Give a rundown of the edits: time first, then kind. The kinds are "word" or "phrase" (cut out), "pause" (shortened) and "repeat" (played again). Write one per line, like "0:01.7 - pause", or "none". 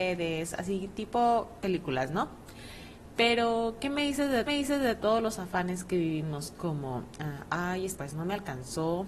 0:04.5 - repeat
0:07.9 - word

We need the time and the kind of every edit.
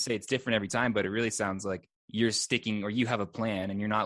0:02.0 - pause

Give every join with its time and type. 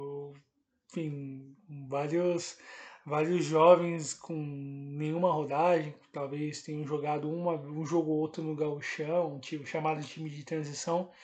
none

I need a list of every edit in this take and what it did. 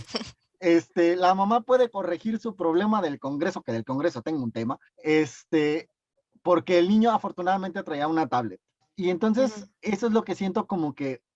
0:04.9 - pause
0:08.8 - pause

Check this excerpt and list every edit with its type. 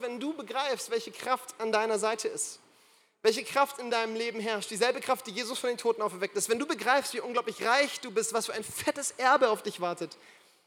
none

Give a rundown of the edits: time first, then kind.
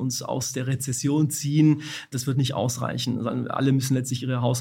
none

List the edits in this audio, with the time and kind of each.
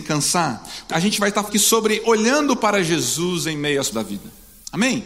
0:00.9 - word
0:01.5 - word
0:03.9 - word

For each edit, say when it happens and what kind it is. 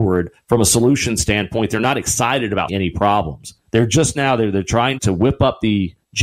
0:02.7 - word
0:03.6 - pause
0:05.0 - word

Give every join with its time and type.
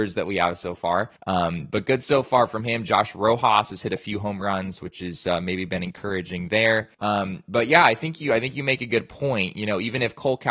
0:01.2 - pause
0:06.9 - pause

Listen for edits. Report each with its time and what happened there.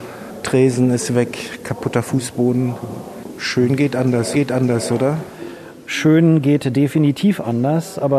0:04.3 - repeat

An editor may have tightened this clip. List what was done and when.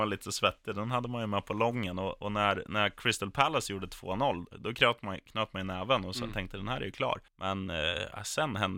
0:07.3 - pause

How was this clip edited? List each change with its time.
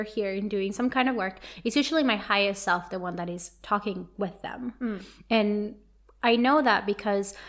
none

